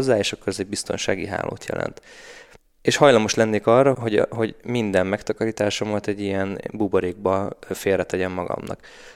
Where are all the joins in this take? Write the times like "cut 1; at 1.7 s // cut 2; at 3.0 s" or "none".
cut 1; at 2.6 s // cut 2; at 3.9 s